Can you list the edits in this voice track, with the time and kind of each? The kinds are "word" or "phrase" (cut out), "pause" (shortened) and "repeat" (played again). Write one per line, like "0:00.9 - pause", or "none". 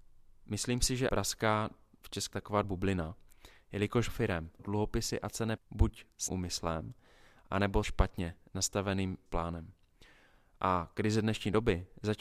0:01.1 - word
0:02.3 - word
0:02.6 - word
0:04.1 - word
0:04.6 - word
0:05.6 - word
0:06.3 - word
0:07.8 - word
0:09.3 - word